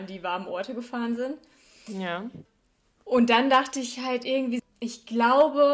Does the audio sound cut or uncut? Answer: cut